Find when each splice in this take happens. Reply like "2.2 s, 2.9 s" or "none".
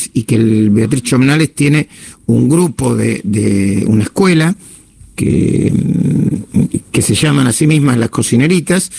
none